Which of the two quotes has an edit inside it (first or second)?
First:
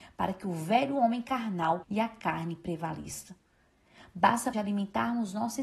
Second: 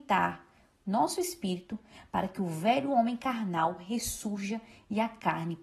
first